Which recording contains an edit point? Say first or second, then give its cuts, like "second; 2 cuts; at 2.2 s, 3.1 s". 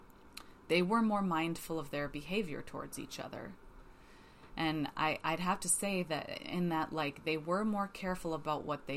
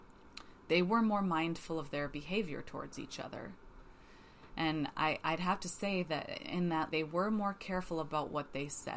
second; 1 cut; at 6.9 s